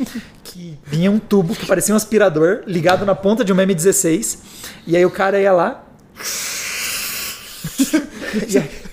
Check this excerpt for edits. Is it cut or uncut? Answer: uncut